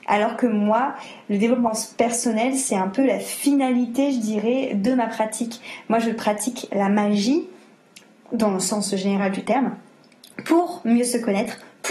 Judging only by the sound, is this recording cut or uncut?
uncut